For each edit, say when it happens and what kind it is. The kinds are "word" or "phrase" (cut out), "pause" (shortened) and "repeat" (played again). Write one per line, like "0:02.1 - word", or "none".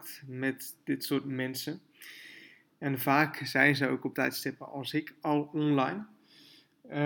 0:04.1 - word